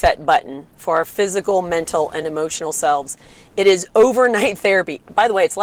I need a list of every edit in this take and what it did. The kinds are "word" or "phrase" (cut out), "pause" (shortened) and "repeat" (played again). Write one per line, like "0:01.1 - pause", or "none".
none

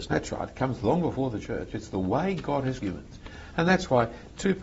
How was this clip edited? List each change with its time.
0:02.8 - word

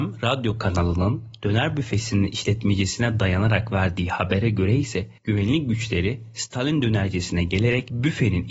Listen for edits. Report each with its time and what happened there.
0:05.2 - pause

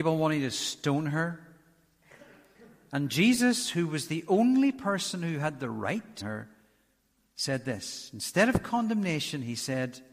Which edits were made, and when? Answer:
0:06.2 - word

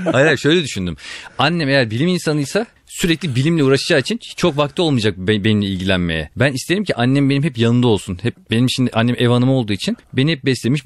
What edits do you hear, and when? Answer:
0:06.3 - pause

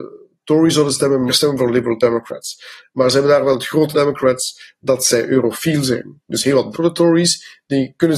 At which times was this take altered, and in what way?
0:01.3 - word
0:03.9 - phrase
0:06.7 - word

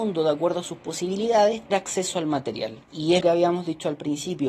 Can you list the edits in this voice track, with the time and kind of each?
0:01.7 - word
0:02.8 - pause
0:03.2 - word

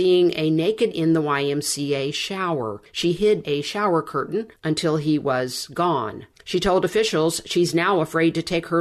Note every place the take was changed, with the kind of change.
0:00.9 - word
0:03.4 - word

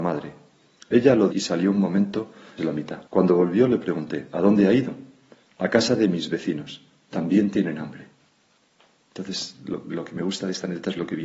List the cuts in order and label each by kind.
0:01.3 - phrase
0:02.6 - word
0:03.1 - pause

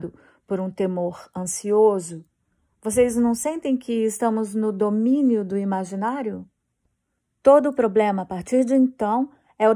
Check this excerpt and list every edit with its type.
none

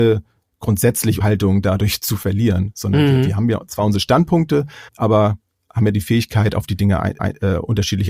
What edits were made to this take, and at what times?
0:01.2 - word
0:04.9 - pause
0:07.2 - repeat

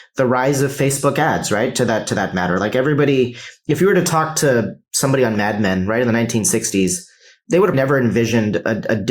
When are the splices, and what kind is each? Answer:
0:07.7 - word

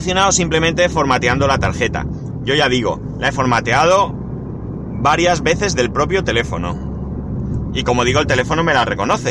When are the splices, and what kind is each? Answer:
0:05.8 - word

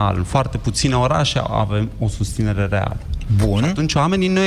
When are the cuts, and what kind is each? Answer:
none

